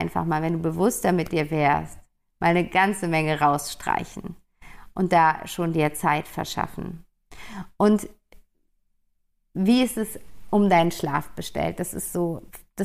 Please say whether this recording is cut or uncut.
uncut